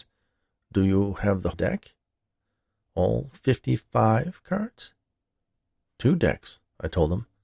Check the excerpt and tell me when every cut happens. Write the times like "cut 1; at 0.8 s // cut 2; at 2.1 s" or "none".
cut 1; at 1.5 s